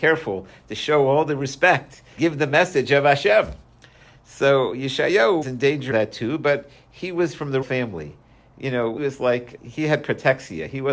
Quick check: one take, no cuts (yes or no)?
no